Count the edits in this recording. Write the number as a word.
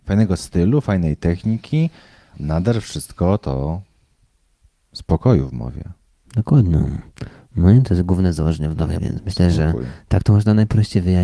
two